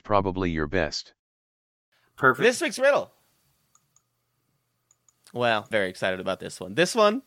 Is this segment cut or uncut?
cut